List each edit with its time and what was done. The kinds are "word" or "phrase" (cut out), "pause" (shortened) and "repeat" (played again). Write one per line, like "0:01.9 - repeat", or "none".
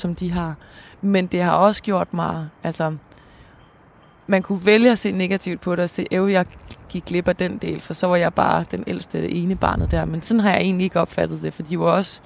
none